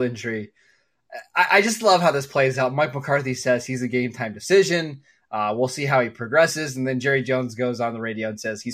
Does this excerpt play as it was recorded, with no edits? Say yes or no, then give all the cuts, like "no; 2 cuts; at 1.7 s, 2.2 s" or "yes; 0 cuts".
yes; 0 cuts